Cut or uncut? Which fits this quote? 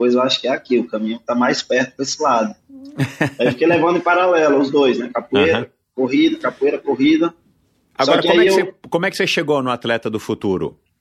uncut